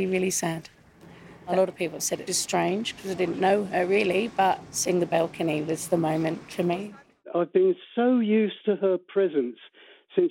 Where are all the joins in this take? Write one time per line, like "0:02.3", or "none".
0:02.3